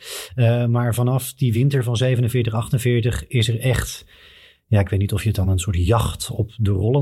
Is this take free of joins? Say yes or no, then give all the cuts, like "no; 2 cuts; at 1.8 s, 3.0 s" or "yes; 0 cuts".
yes; 0 cuts